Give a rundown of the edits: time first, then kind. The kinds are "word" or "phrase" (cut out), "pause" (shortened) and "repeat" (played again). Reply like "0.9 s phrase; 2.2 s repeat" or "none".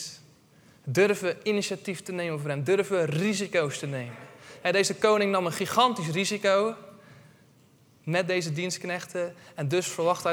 none